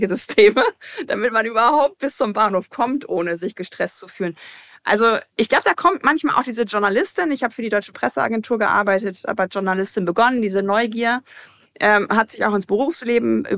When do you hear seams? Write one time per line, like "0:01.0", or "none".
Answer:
none